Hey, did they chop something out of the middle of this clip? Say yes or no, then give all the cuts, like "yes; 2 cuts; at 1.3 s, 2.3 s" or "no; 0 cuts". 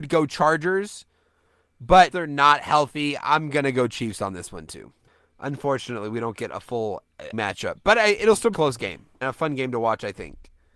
yes; 5 cuts; at 2.1 s, 5.1 s, 7.3 s, 8.5 s, 9.2 s